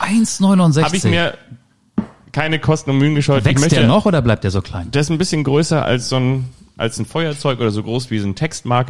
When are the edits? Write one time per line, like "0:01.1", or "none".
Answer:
none